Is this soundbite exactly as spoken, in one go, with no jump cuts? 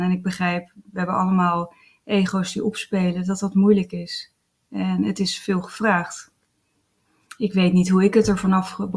yes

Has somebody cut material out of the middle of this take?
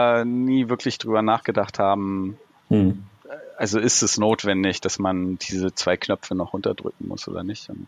no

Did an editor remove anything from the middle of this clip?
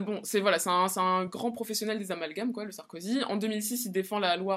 no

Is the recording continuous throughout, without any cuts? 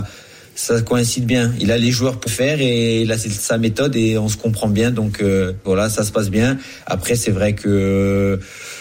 no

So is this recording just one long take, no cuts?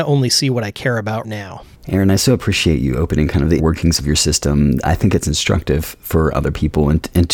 no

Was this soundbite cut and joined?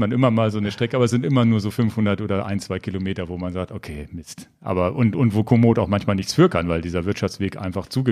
no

